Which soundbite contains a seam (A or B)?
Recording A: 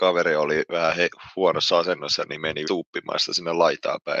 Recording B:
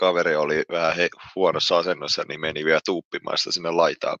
A